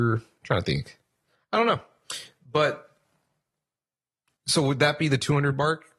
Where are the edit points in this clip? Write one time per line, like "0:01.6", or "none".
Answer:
none